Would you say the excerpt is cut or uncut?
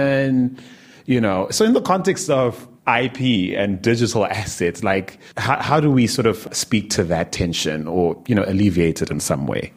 cut